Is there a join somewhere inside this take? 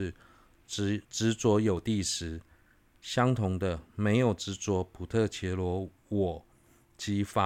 yes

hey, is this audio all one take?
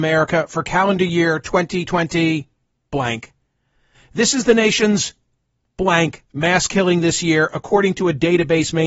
yes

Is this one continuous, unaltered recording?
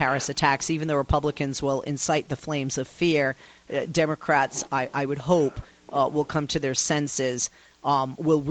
yes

